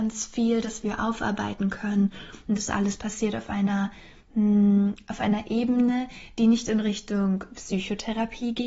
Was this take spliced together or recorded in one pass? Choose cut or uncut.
uncut